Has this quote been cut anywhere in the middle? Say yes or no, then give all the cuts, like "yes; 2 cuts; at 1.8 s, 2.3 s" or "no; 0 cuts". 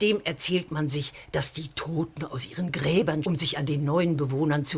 yes; 1 cut; at 3.2 s